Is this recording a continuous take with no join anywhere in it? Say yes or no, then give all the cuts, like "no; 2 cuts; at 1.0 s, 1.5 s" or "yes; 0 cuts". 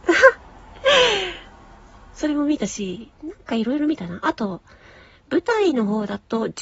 no; 1 cut; at 3.2 s